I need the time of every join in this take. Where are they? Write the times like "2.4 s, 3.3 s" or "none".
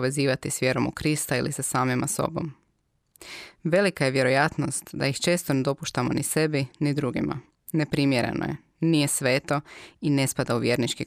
7.5 s